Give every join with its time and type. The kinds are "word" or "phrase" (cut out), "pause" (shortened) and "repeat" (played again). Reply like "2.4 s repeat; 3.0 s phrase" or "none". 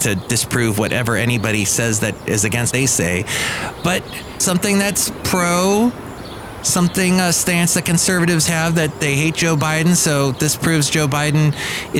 2.7 s word; 4.4 s word